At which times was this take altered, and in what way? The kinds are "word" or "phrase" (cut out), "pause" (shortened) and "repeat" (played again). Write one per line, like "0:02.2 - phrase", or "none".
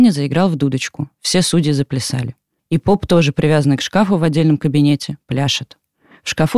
0:02.6 - pause